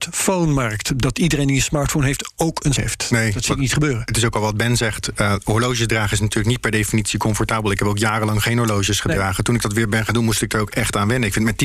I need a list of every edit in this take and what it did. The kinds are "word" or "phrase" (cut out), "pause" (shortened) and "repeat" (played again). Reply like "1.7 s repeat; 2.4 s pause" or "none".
2.8 s word

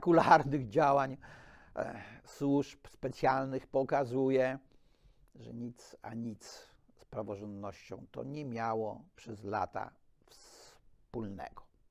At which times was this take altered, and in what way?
none

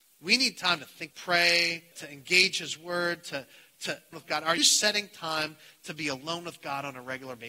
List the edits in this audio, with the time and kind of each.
1.1 s phrase; 1.9 s word; 4.1 s phrase; 4.6 s word

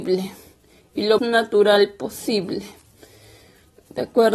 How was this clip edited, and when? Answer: 1.2 s word

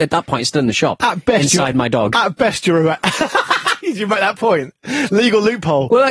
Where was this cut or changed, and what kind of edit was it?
none

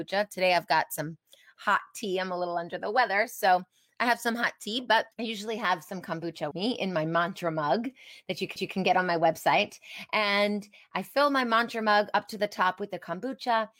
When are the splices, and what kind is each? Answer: 5.1 s pause; 6.5 s word; 8.6 s repeat

